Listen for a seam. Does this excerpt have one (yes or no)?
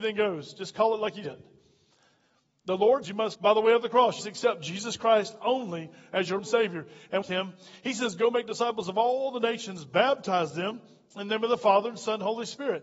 yes